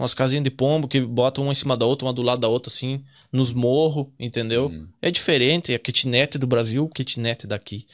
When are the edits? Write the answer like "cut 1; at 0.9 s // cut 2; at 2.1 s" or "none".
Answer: cut 1; at 6.9 s